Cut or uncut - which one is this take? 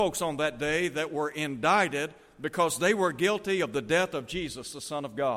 uncut